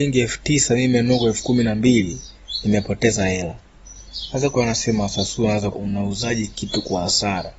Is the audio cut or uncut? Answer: cut